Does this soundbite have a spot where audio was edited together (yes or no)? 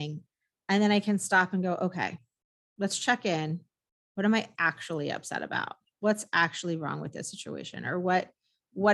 no